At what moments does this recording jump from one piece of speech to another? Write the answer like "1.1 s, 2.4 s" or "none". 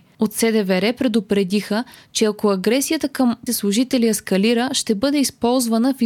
3.5 s